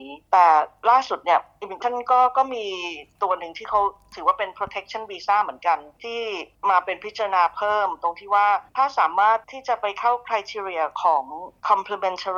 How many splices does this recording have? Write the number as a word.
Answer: three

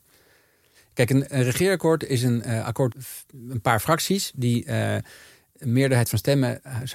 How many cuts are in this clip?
one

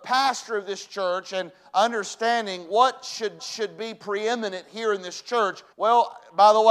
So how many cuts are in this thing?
two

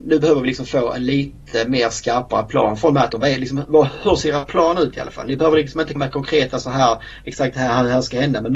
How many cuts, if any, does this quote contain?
one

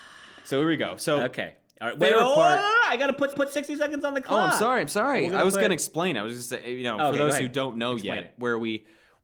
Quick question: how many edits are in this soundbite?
one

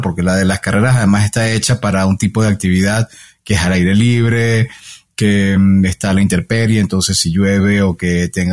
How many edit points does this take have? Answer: zero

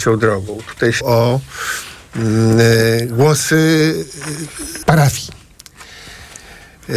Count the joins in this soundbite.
two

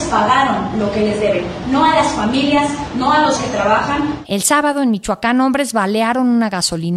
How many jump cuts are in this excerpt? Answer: one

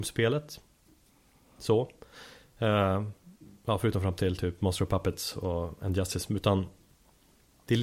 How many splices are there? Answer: zero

